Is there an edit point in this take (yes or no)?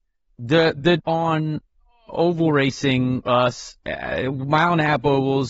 yes